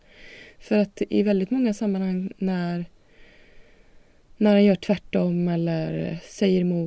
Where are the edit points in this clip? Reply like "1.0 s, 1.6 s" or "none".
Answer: none